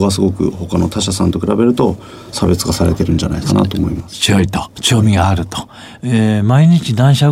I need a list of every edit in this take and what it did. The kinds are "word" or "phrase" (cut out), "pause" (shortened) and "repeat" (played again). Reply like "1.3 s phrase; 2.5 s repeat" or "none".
none